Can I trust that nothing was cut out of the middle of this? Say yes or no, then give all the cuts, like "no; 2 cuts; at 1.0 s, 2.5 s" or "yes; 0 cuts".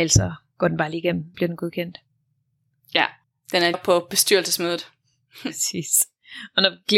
no; 3 cuts; at 1.3 s, 3.2 s, 3.7 s